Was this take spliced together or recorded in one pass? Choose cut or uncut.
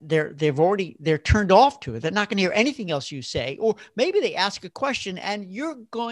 uncut